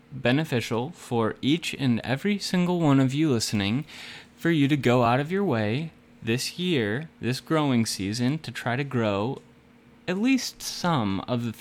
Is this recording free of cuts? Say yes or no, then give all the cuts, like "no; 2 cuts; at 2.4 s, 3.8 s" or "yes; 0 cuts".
yes; 0 cuts